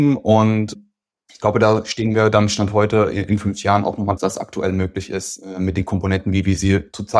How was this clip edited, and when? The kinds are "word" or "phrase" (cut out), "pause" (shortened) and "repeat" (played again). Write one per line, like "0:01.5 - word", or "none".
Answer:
0:04.2 - phrase